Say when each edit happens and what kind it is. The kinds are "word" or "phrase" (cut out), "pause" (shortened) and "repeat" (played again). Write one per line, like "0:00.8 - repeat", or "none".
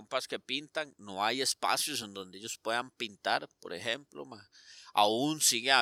none